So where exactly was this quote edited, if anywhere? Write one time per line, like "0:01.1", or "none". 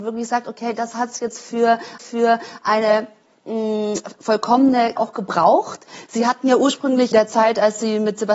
0:02.0
0:05.0
0:07.1